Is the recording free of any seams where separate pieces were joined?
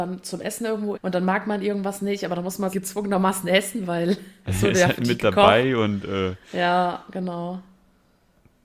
no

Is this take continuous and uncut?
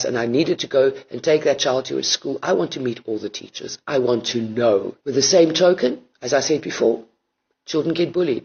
no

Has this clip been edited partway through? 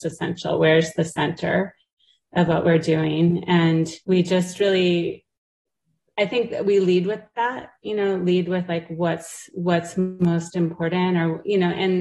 yes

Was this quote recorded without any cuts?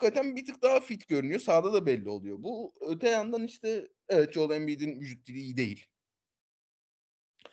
yes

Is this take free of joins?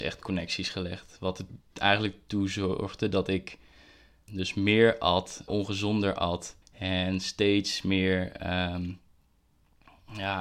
no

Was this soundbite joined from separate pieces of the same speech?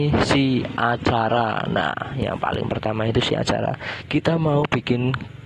no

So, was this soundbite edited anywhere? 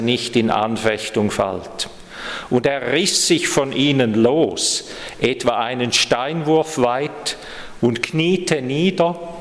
no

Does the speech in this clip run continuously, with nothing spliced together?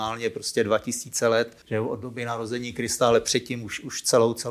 no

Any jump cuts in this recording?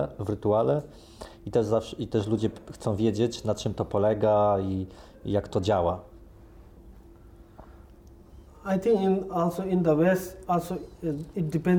no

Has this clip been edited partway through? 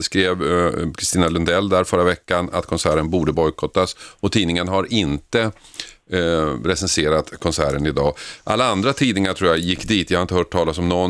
no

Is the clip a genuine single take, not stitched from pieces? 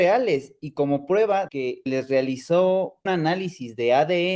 no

